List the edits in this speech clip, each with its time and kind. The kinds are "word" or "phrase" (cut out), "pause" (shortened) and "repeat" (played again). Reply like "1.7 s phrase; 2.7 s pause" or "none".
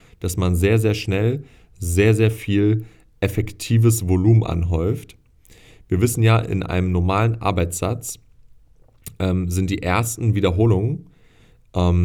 none